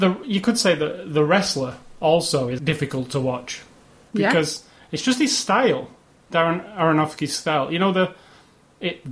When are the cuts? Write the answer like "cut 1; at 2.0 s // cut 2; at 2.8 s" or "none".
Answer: cut 1; at 2.6 s